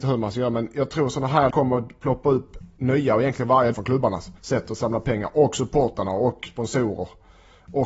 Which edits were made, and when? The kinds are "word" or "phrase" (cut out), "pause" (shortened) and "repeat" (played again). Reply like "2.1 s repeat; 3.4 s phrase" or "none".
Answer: 1.5 s word; 2.7 s pause; 3.7 s word; 4.4 s pause